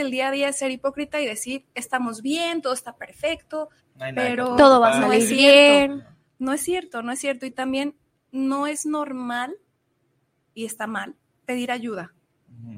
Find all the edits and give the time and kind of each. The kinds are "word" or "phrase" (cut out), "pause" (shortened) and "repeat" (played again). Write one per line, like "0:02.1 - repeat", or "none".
0:03.8 - pause